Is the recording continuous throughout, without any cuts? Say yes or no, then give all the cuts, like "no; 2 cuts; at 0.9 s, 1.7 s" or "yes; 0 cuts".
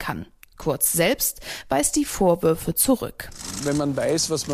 yes; 0 cuts